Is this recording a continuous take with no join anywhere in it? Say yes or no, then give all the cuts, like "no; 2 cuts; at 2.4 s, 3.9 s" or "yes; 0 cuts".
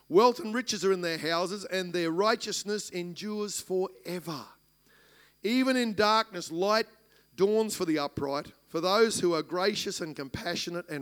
yes; 0 cuts